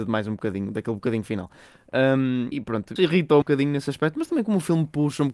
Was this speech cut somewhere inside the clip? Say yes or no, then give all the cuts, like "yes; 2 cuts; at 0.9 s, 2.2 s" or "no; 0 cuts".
yes; 3 cuts; at 2.5 s, 3.0 s, 3.4 s